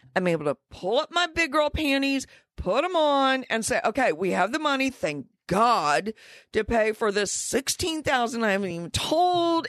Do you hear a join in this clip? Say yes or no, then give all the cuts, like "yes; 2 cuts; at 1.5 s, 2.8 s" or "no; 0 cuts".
no; 0 cuts